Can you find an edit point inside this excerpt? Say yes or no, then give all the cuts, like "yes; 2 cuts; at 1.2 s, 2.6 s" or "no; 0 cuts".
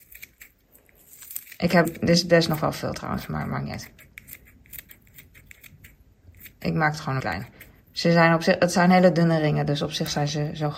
yes; 2 cuts; at 1.8 s, 7.2 s